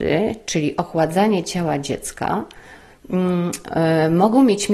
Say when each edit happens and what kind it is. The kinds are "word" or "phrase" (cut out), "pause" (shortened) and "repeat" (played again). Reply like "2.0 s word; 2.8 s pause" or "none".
none